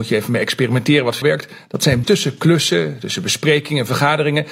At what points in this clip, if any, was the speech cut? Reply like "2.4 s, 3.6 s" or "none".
1.2 s, 2.0 s